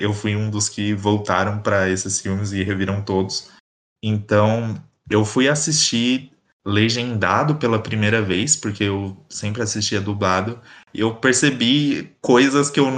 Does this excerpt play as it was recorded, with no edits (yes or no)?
yes